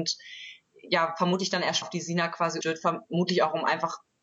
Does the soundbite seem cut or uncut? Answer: cut